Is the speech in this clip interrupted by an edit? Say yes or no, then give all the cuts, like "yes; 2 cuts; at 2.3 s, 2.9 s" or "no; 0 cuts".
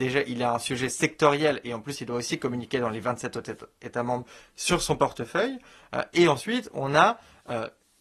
no; 0 cuts